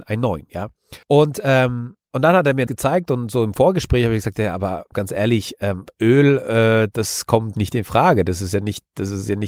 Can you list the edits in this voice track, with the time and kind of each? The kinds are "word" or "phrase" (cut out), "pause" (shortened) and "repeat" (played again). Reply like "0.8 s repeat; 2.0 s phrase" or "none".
1.0 s pause; 2.0 s pause; 2.7 s word; 4.9 s word; 6.9 s word; 7.5 s word